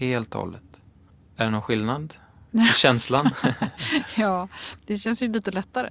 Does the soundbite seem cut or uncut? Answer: cut